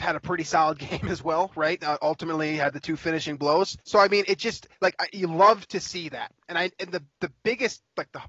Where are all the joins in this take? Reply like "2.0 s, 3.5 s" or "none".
3.8 s, 4.7 s